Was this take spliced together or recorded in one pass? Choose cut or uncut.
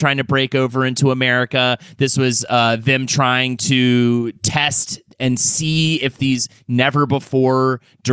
uncut